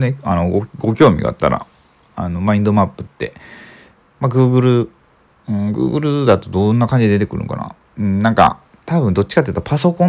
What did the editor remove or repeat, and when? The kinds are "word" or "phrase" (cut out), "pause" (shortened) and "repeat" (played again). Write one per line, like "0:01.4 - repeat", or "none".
none